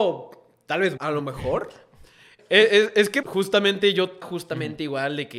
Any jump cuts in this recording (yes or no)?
yes